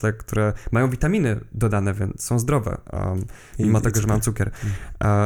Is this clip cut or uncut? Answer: uncut